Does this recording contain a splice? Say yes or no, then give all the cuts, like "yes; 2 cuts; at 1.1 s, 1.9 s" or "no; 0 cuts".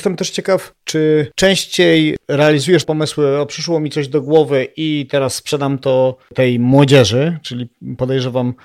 yes; 1 cut; at 2.8 s